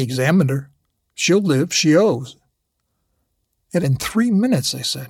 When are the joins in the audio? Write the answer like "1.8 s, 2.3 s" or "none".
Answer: 3.8 s